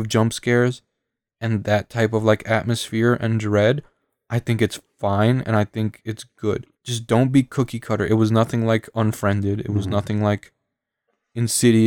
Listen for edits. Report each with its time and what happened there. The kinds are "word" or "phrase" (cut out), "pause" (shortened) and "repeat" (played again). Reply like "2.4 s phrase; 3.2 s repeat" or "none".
6.7 s pause